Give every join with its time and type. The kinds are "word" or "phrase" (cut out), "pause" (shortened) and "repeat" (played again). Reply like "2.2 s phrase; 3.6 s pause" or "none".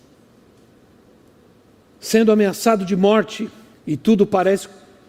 3.7 s pause